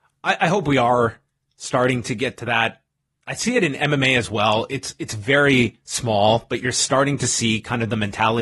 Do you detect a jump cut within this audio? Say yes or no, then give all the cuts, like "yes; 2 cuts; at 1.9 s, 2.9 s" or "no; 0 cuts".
no; 0 cuts